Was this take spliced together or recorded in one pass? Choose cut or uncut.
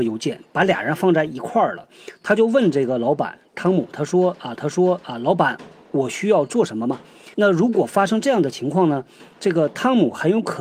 cut